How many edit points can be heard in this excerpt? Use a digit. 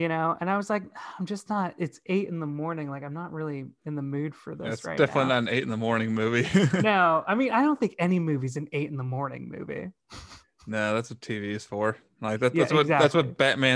0